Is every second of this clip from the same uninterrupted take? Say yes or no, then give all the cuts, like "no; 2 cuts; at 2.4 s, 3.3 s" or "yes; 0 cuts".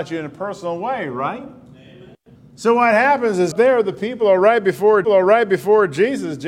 no; 3 cuts; at 2.4 s, 3.5 s, 5.0 s